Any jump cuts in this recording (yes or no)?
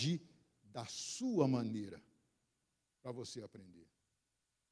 no